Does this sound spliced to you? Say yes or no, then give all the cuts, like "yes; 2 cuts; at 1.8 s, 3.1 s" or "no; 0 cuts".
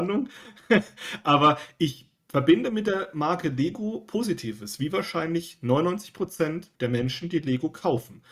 yes; 1 cut; at 6.8 s